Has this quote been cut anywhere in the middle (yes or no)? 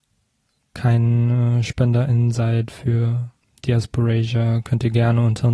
no